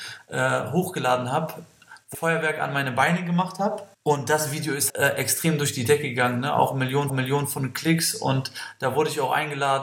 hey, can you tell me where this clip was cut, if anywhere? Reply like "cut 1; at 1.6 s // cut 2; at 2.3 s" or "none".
cut 1; at 2.1 s // cut 2; at 3.9 s // cut 3; at 4.9 s // cut 4; at 7.1 s